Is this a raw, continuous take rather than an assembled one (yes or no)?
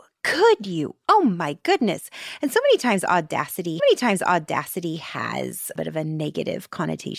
no